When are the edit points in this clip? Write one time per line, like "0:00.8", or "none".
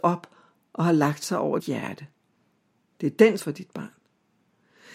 0:01.6
0:03.4